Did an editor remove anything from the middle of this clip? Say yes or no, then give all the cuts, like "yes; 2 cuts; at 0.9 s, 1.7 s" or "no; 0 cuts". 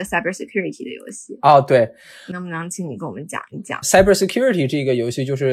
no; 0 cuts